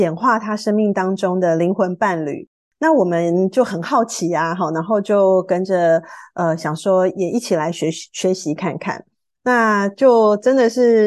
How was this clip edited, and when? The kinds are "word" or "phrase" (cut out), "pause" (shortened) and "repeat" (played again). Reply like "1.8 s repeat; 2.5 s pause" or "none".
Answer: none